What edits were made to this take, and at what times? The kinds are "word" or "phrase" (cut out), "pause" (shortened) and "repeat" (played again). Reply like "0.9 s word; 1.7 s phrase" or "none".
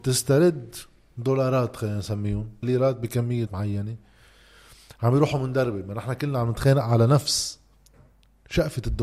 2.6 s word; 3.5 s phrase